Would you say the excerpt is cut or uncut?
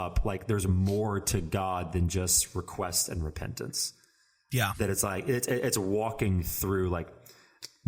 uncut